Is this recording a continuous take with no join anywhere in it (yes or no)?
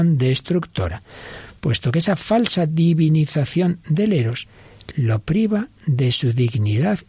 yes